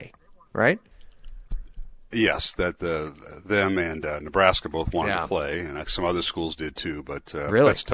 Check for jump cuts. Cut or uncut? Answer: cut